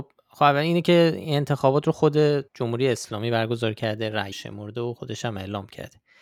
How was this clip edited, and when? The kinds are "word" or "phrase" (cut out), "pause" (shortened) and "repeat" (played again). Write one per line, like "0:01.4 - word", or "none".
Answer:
0:02.5 - pause
0:04.3 - word

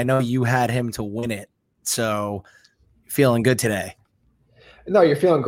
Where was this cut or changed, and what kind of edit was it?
none

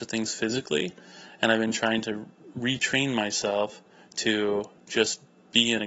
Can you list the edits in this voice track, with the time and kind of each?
none

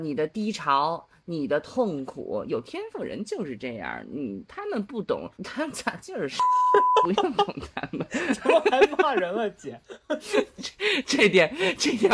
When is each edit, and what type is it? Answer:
0:05.3 - pause

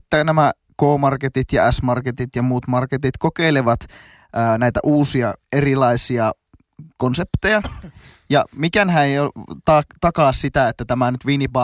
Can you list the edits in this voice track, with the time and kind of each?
0:05.4 - pause

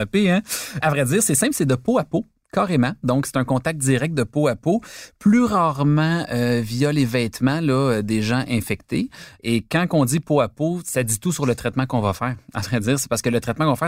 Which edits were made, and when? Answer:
none

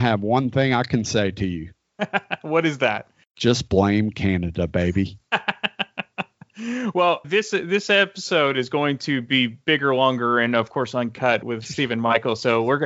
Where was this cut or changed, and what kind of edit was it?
0:07.2 - word
0:11.4 - word

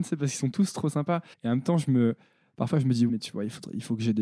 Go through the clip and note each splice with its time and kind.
0:01.3 - pause
0:03.1 - word

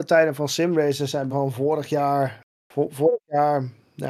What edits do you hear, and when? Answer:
0:01.3 - word

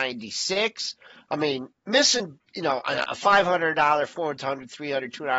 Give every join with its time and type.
none

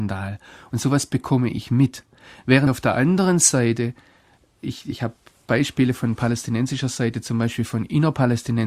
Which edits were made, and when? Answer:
none

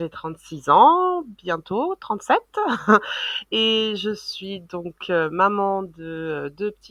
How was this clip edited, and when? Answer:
none

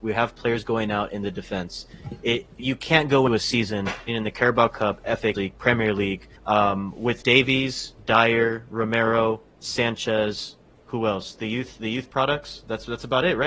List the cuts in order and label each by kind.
0:02.6 - word
0:03.3 - word
0:04.1 - word
0:05.3 - phrase
0:06.4 - pause
0:07.2 - word
0:10.7 - pause

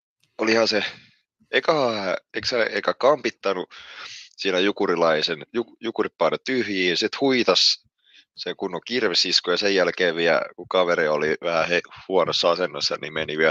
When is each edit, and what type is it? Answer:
none

